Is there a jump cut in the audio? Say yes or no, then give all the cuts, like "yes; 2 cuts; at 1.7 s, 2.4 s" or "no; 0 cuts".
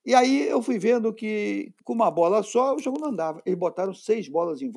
no; 0 cuts